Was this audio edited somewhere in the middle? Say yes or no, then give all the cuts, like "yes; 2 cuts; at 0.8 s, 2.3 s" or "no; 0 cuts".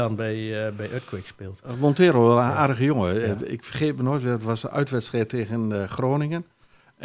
no; 0 cuts